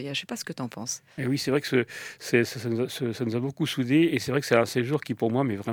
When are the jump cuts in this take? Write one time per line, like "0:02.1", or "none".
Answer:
0:01.1